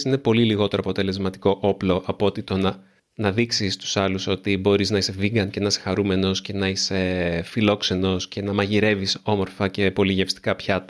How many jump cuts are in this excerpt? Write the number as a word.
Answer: one